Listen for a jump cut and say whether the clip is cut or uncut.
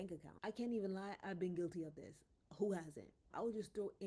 uncut